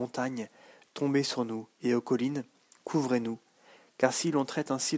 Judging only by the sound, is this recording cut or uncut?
uncut